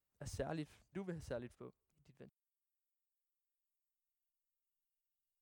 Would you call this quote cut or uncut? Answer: cut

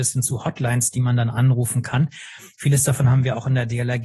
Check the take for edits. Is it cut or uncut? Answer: uncut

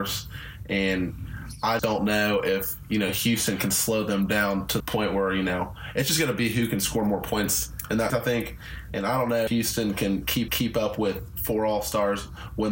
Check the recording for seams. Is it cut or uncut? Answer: cut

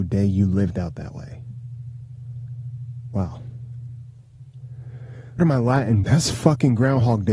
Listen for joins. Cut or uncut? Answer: cut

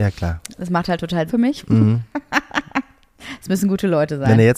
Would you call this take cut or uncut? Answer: cut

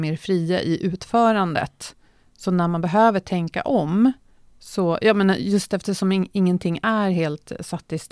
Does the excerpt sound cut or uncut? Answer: uncut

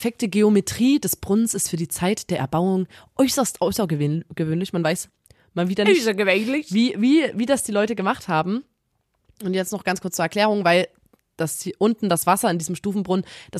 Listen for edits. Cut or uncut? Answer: uncut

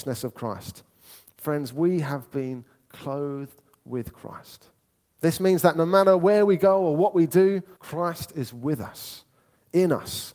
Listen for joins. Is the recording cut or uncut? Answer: cut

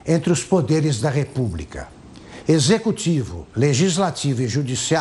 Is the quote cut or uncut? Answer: uncut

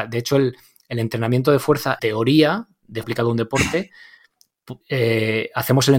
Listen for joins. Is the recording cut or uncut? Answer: cut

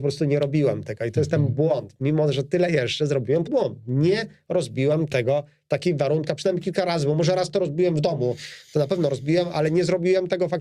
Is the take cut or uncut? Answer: cut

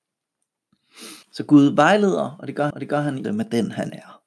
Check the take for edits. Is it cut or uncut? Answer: cut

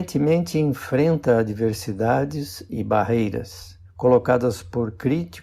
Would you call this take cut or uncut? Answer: cut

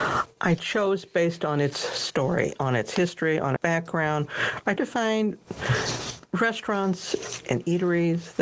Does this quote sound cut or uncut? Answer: cut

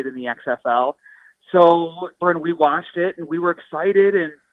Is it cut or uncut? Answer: cut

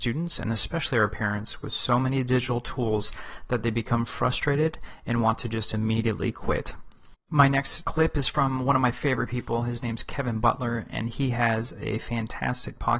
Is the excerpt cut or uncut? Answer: uncut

